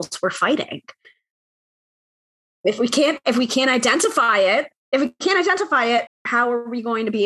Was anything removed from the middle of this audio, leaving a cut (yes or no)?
yes